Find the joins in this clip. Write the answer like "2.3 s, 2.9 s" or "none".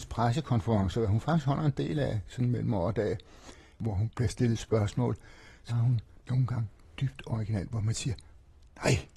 5.7 s